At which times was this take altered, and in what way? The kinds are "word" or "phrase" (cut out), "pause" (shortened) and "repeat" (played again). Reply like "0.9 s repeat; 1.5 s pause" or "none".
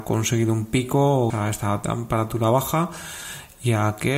1.3 s word